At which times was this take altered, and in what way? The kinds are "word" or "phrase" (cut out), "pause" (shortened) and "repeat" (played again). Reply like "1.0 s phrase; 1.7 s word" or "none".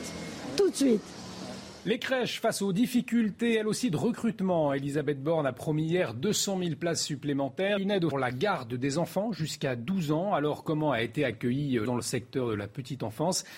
7.8 s word; 8.1 s phrase; 11.8 s word